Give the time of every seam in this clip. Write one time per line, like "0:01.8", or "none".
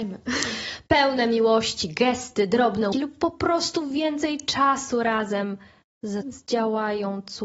0:02.9
0:06.2